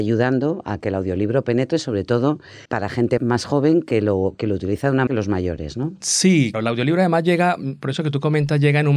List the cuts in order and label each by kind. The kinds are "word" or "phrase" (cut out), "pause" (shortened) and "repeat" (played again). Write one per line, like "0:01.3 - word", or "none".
0:02.7 - pause
0:03.2 - word
0:05.1 - phrase
0:06.5 - word